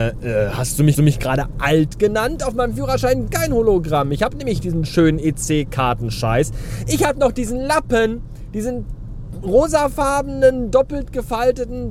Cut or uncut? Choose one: cut